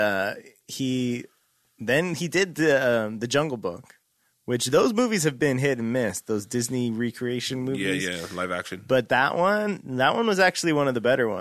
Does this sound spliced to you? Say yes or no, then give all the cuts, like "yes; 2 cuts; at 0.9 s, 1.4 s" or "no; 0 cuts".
no; 0 cuts